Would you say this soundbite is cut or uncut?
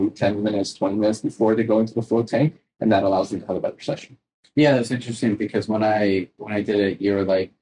uncut